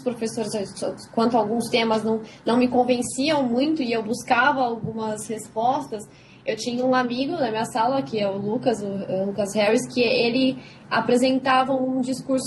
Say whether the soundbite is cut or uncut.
uncut